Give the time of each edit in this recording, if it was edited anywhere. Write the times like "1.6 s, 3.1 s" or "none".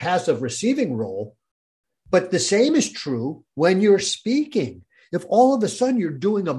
none